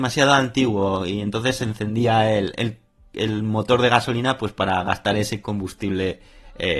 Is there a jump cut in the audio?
no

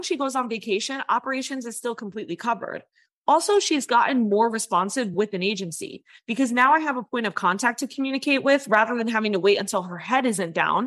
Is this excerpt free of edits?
yes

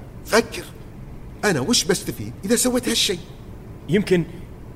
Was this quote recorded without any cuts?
yes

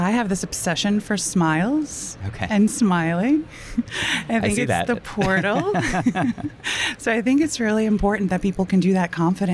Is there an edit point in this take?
no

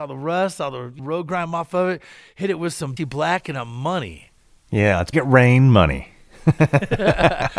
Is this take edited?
yes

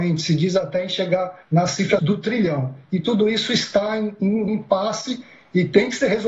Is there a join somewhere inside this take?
yes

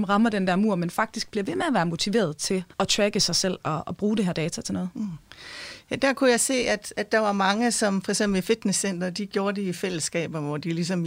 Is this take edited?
yes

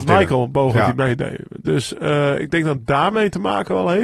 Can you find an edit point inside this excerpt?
no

